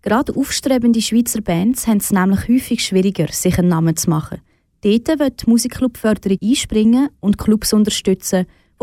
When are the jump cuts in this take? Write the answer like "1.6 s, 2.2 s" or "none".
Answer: 6.4 s